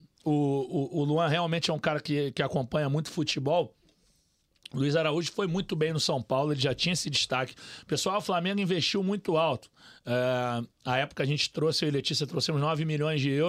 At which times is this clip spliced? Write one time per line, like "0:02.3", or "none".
none